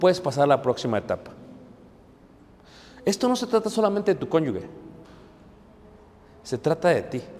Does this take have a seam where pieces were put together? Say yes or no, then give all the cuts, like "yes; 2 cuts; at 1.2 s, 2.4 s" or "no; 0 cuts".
no; 0 cuts